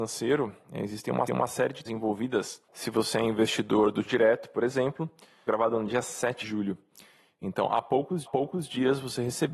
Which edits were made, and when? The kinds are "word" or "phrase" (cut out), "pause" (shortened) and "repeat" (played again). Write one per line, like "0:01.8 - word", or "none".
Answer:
0:01.3 - repeat
0:01.9 - word
0:02.7 - pause
0:04.1 - word
0:05.5 - phrase
0:06.4 - word
0:08.3 - repeat